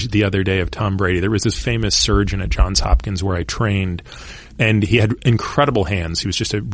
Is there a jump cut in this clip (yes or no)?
yes